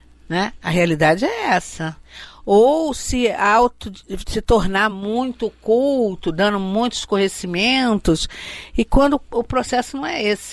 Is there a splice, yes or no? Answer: no